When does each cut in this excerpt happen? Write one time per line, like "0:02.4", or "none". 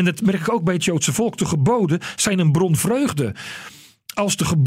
0:02.8